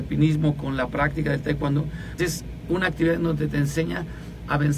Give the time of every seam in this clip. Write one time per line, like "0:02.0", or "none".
0:02.2